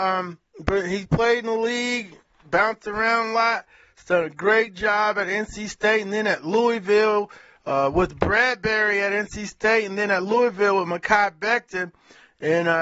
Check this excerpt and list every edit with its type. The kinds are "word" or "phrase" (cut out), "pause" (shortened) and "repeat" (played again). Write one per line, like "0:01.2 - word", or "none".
none